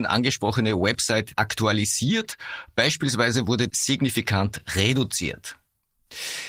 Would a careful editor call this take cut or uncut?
cut